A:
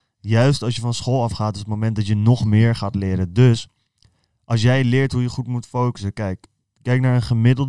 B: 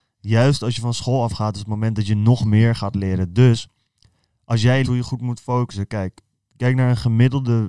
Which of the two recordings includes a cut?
B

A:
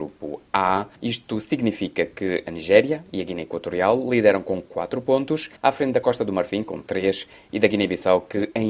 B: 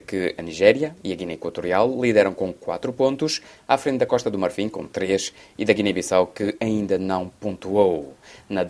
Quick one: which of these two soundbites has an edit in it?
A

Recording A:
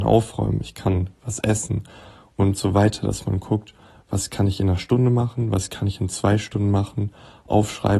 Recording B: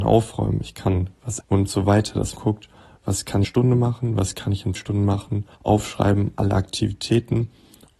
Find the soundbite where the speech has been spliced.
B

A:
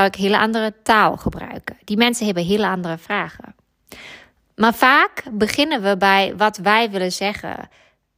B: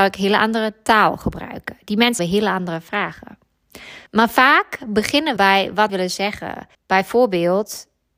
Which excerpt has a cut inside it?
B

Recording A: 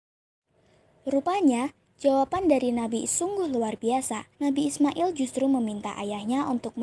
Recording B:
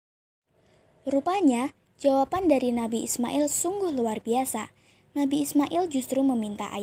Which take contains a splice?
A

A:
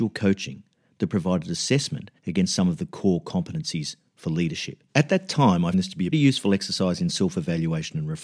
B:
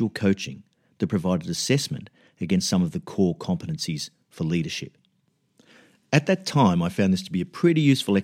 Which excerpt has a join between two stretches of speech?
A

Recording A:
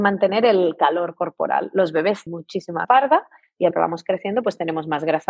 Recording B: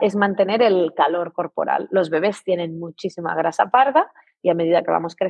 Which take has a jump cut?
A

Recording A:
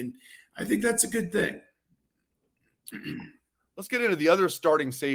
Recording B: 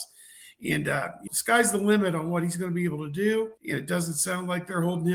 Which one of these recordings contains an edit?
B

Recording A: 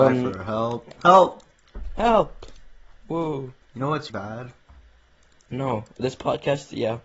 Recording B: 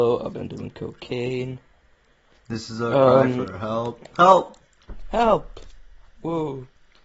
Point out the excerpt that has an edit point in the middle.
A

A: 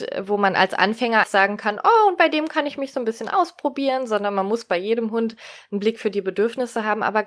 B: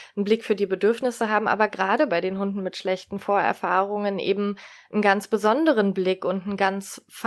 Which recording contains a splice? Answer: A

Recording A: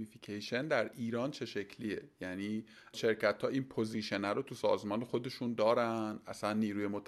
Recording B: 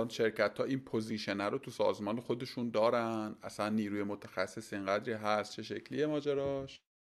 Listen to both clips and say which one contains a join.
A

